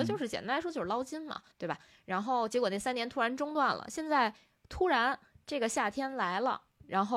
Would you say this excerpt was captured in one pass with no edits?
no; 1 cut; at 1.5 s

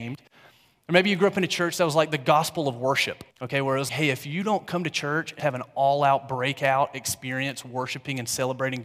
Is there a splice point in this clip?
yes; 3 cuts; at 3.3 s, 3.9 s, 5.4 s

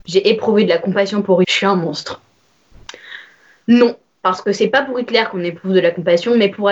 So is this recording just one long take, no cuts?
no; 1 cut; at 1.4 s

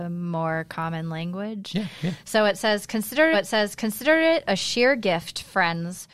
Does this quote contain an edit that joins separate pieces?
yes; 1 cut; at 3.3 s

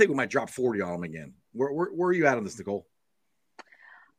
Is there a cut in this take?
no; 0 cuts

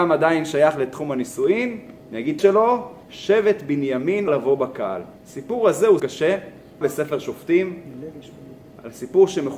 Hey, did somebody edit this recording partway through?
yes; 7 cuts; at 2.0 s, 2.4 s, 3.0 s, 4.3 s, 5.2 s, 6.0 s, 6.8 s

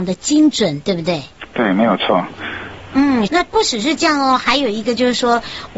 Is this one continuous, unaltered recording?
no; 1 cut; at 3.3 s

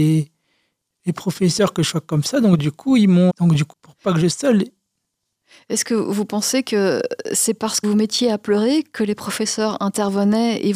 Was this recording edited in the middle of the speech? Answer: yes; 4 cuts; at 3.3 s, 3.7 s, 4.3 s, 7.8 s

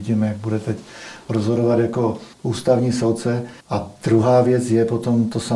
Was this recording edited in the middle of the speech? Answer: yes; 2 cuts; at 2.3 s, 3.6 s

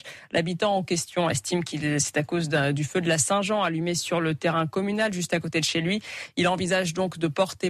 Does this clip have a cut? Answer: no; 0 cuts

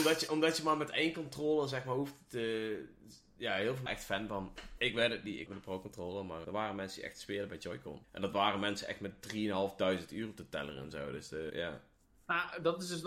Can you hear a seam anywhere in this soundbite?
yes; 5 cuts; at 3.9 s, 5.5 s, 6.4 s, 8.0 s, 11.5 s

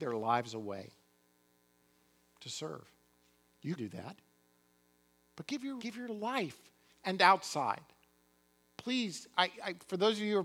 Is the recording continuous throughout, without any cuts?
no; 3 cuts; at 3.8 s, 5.8 s, 6.9 s

